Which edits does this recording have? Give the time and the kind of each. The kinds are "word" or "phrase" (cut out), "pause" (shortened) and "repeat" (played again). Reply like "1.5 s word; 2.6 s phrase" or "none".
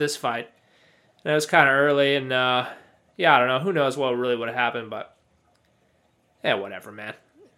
none

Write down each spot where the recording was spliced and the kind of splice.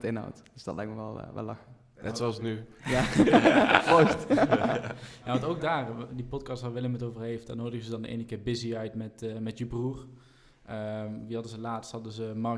none

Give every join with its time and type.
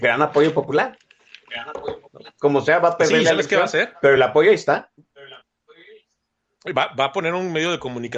none

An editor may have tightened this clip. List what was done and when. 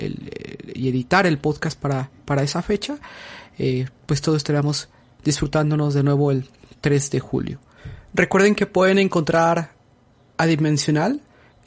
none

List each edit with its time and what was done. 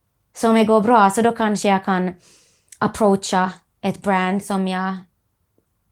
none

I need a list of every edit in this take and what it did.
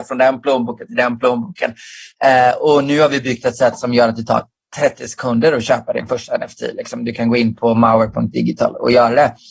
none

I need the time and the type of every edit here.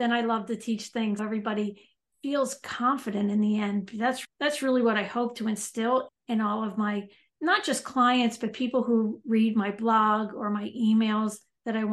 1.2 s word; 4.2 s word; 6.1 s word

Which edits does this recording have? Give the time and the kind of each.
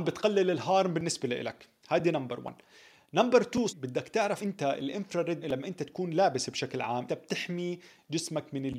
3.7 s word; 4.4 s word; 5.4 s word; 7.1 s word

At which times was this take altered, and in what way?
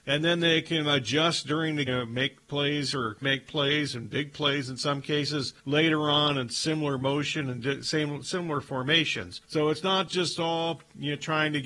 1.9 s phrase; 3.2 s phrase; 5.6 s pause; 9.4 s pause

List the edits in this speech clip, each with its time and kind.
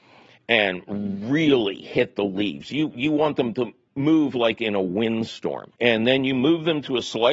5.7 s pause

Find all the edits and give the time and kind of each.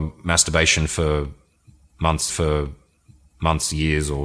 2.3 s repeat

